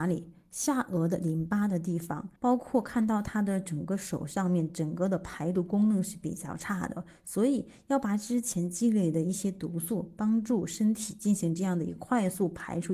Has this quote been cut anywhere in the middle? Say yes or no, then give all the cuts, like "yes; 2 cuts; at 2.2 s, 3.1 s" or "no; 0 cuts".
yes; 1 cut; at 2.4 s